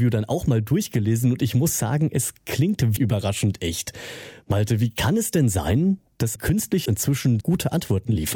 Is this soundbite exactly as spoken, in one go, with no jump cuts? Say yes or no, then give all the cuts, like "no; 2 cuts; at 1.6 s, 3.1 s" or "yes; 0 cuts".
no; 4 cuts; at 3.0 s, 6.4 s, 6.9 s, 7.4 s